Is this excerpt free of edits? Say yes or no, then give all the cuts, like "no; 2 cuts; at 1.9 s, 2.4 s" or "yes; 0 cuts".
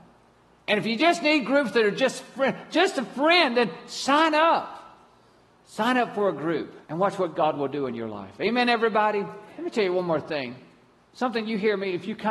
no; 2 cuts; at 6.8 s, 9.5 s